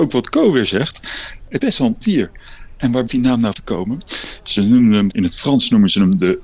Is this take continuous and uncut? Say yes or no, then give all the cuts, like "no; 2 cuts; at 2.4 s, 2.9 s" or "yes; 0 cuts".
no; 5 cuts; at 1.6 s, 2.0 s, 3.1 s, 3.5 s, 5.1 s